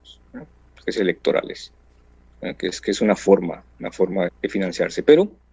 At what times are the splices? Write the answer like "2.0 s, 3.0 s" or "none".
1.0 s, 3.7 s, 4.3 s